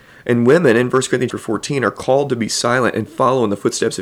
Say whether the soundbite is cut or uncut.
cut